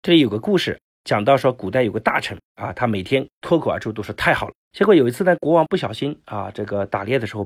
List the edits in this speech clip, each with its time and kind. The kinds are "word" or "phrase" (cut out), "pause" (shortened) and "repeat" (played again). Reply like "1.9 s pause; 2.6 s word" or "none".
2.5 s pause; 4.6 s pause